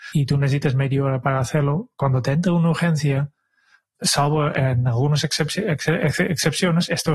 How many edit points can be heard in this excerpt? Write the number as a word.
zero